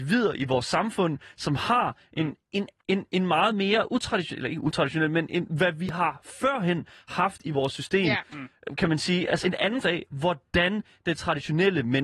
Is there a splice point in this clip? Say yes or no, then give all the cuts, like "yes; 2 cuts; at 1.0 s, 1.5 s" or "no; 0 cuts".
yes; 3 cuts; at 2.8 s, 9.4 s, 9.8 s